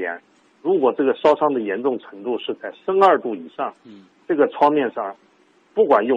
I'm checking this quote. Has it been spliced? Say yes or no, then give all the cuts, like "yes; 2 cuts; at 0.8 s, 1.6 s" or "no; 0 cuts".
no; 0 cuts